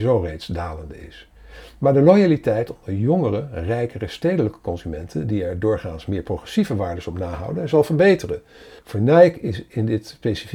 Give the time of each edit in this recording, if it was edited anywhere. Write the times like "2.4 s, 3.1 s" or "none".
8.8 s